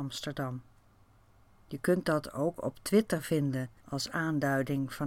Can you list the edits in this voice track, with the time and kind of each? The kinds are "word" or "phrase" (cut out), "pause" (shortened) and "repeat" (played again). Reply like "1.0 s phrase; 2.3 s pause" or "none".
3.8 s pause